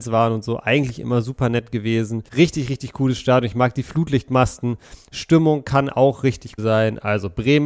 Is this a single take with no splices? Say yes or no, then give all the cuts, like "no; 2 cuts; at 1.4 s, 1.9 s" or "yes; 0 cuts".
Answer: no; 2 cuts; at 2.3 s, 6.6 s